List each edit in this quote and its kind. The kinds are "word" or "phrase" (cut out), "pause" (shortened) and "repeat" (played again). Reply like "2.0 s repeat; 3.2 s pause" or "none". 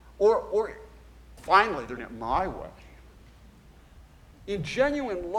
1.4 s word; 2.0 s word